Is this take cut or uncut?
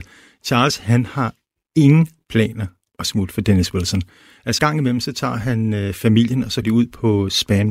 cut